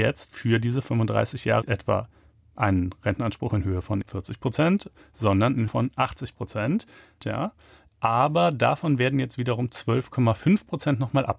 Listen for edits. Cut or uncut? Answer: cut